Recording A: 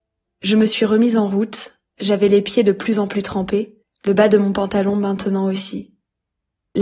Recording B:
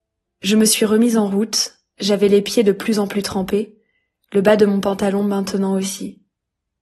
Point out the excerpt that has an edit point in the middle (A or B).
A